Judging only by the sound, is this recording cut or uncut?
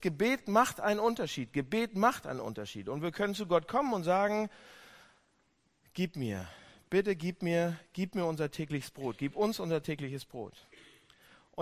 uncut